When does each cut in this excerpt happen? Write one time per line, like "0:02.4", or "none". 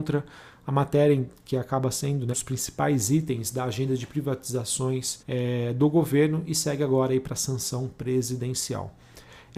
0:02.3
0:05.2